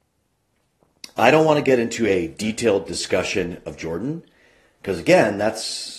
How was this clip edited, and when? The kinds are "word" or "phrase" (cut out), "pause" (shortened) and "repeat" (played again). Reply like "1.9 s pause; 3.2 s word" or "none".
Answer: none

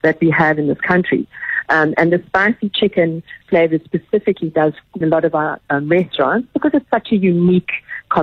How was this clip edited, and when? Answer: 3.4 s pause; 5.0 s phrase

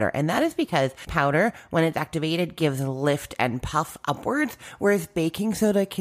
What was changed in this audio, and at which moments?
1.1 s word

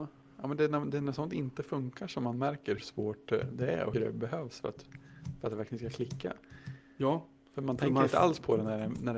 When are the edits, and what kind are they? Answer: 2.8 s word; 3.9 s word

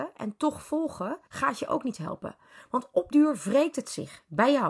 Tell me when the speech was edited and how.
1.3 s pause; 3.1 s word

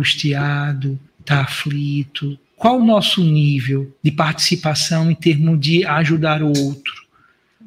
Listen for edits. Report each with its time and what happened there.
1.1 s pause; 2.4 s pause; 4.0 s pause

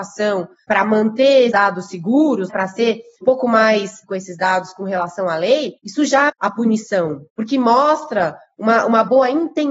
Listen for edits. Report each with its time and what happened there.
1.5 s word; 2.5 s word; 3.2 s word; 4.0 s word; 6.3 s word

